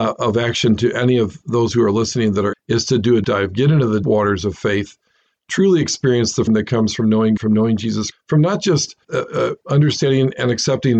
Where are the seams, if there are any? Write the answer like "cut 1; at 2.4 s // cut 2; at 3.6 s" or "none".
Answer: cut 1; at 2.5 s // cut 2; at 3.2 s // cut 3; at 4.0 s // cut 4; at 6.5 s // cut 5; at 7.4 s // cut 6; at 8.1 s // cut 7; at 9.0 s // cut 8; at 9.6 s